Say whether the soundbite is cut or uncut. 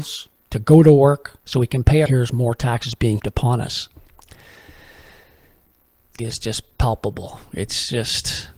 cut